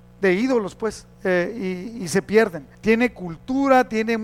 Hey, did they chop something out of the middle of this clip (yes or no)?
yes